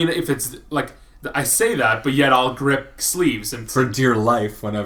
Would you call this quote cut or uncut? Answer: cut